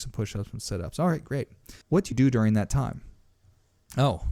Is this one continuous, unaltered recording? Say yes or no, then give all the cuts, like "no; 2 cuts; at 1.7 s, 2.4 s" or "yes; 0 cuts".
no; 2 cuts; at 1.8 s, 2.1 s